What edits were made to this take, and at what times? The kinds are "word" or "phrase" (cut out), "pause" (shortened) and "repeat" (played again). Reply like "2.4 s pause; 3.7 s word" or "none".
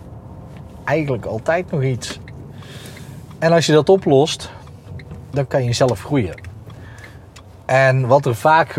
none